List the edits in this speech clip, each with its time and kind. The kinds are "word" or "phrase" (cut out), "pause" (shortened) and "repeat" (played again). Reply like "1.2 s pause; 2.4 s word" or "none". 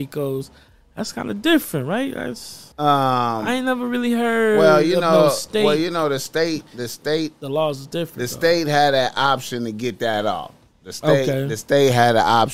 2.7 s pause